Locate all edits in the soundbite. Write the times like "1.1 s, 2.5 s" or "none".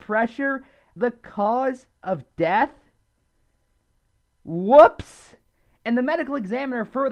1.0 s